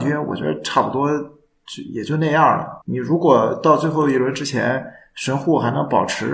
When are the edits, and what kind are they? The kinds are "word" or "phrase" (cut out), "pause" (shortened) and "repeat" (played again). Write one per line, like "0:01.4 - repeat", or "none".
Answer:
0:02.8 - pause

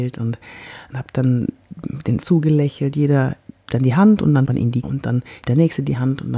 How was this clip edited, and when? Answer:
0:00.9 - word
0:02.2 - word
0:03.7 - word
0:04.4 - word
0:04.8 - word
0:05.4 - word

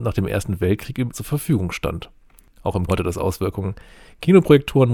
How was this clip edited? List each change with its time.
0:01.1 - word
0:02.9 - word

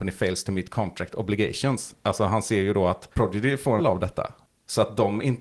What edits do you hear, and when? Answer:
0:03.1 - pause
0:03.8 - phrase

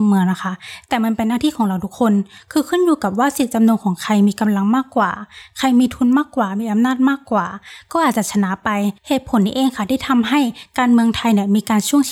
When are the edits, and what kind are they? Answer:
0:09.0 - pause

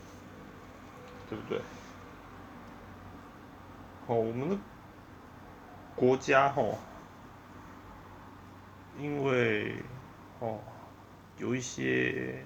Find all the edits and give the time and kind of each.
0:08.9 - phrase

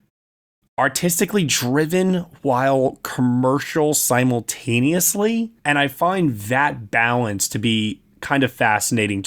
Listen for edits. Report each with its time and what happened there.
0:05.6 - pause

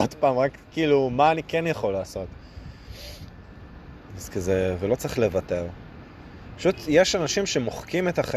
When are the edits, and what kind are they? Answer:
none

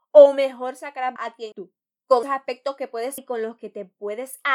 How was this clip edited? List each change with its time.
0:01.2 - word
0:01.5 - word
0:02.2 - word
0:03.2 - word

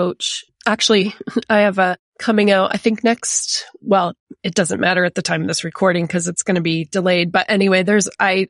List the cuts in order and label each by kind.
none

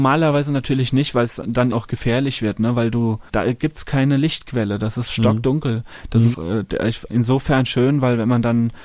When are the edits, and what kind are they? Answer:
0:01.7 - word
0:03.3 - word
0:06.3 - word
0:07.1 - word

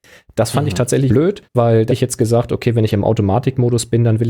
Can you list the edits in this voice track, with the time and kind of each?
0:01.1 - phrase
0:01.4 - pause
0:01.9 - word

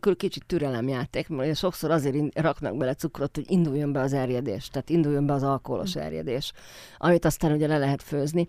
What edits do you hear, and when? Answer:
none

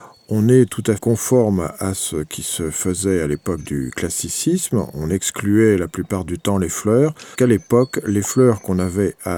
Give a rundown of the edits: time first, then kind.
0:01.0 - word
0:07.3 - word

